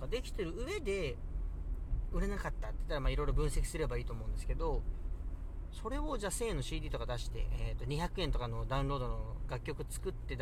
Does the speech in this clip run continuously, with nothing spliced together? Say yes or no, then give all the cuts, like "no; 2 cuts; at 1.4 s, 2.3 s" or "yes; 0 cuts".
yes; 0 cuts